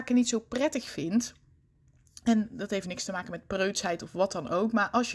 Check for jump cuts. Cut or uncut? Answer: cut